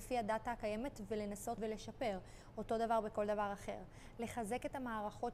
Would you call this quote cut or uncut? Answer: cut